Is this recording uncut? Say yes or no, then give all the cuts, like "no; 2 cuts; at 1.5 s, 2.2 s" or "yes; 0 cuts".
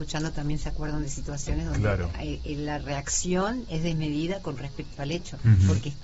yes; 0 cuts